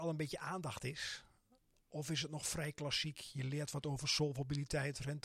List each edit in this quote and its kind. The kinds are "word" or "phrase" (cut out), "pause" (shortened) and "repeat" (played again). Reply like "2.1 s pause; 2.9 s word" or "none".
none

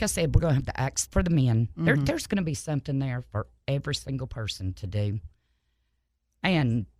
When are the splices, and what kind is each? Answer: 1.1 s word

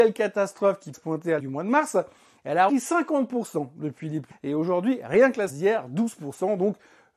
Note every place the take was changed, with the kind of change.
0.9 s word; 1.4 s word; 2.7 s word; 4.3 s word; 5.5 s word

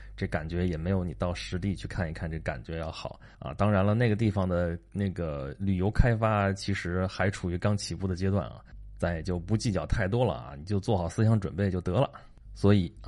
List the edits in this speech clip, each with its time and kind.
3.3 s pause

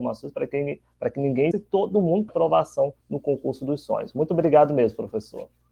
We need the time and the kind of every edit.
1.5 s word; 2.3 s word; 3.0 s pause

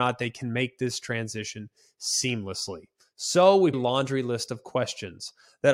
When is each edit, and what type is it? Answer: 3.7 s phrase

